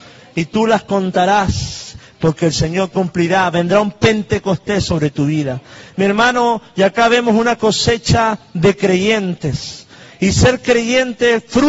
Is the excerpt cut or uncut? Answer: uncut